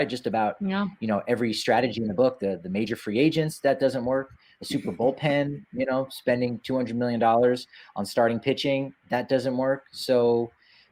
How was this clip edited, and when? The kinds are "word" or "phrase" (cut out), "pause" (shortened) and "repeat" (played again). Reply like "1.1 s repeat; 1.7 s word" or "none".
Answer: none